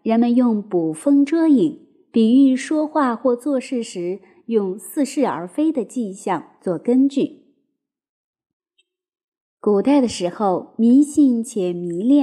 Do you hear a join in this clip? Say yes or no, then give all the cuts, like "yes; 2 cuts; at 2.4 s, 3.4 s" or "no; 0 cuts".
no; 0 cuts